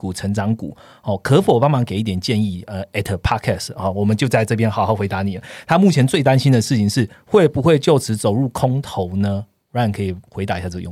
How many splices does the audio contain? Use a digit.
0